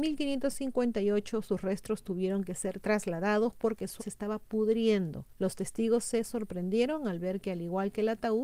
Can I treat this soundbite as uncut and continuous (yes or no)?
no